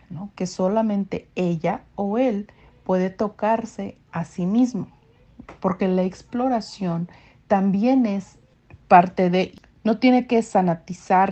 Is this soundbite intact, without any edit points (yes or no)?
yes